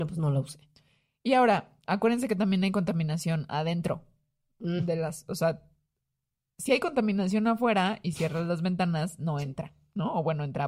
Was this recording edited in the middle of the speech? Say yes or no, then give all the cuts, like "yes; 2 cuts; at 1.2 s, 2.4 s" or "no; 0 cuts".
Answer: no; 0 cuts